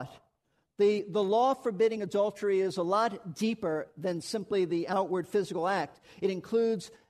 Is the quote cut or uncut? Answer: uncut